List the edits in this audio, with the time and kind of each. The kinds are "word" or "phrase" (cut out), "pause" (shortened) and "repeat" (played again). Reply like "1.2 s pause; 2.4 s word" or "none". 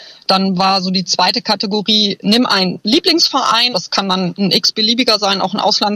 3.7 s word